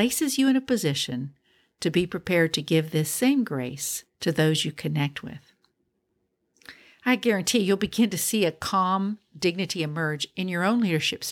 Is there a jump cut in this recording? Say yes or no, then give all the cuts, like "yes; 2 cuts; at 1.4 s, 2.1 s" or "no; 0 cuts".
no; 0 cuts